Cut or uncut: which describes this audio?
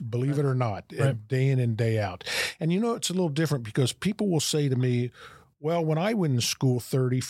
uncut